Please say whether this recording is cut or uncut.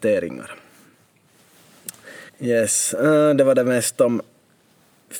cut